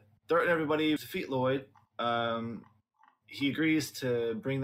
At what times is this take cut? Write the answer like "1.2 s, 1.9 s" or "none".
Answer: 1.0 s